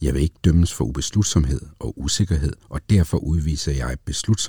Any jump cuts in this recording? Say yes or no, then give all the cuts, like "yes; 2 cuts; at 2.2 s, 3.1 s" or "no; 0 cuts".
yes; 1 cut; at 2.6 s